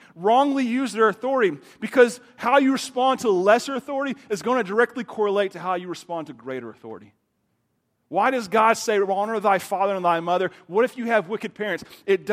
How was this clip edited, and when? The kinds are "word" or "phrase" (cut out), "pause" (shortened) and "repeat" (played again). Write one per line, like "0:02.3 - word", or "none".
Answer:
none